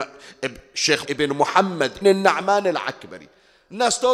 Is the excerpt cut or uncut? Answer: cut